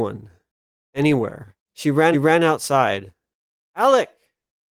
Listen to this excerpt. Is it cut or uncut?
cut